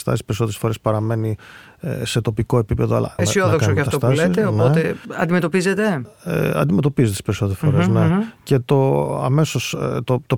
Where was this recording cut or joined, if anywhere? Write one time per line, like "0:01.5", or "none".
0:03.2